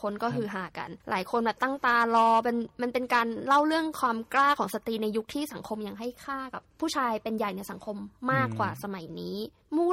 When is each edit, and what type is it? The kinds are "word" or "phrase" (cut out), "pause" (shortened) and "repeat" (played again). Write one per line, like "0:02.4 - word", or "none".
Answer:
0:01.0 - pause